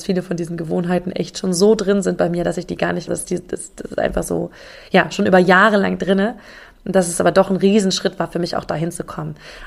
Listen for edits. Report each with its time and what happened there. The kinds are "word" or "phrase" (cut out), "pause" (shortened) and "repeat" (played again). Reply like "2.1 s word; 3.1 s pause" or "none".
3.1 s phrase